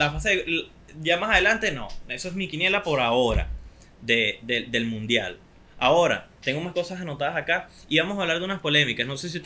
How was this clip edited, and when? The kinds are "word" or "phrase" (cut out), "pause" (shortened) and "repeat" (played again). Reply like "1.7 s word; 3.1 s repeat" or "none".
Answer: none